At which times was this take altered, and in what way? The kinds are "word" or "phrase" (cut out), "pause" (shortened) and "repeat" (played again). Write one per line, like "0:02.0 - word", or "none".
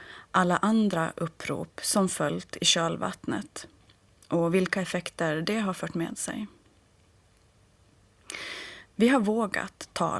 none

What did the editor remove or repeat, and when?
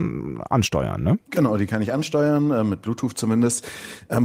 0:01.2 - pause

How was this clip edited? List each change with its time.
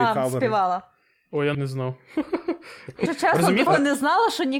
0:01.5 - word
0:03.1 - word
0:03.7 - word

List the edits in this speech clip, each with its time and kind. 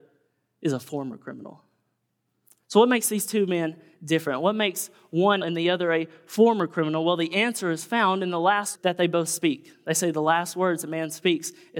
0:05.4 - phrase
0:08.8 - word

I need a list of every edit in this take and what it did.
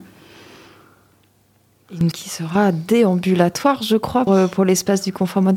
0:02.1 - word
0:04.3 - word

